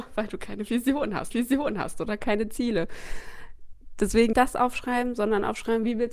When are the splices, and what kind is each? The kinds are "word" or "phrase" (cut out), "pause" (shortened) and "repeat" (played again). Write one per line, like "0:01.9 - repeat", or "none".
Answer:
0:01.3 - repeat
0:04.3 - word